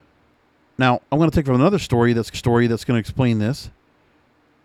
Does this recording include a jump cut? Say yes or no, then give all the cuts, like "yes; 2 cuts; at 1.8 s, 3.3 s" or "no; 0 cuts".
yes; 2 cuts; at 1.0 s, 2.3 s